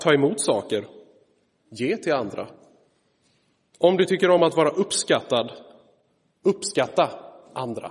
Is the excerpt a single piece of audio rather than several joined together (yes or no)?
yes